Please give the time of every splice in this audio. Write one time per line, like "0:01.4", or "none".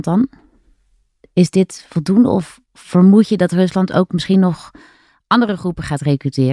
none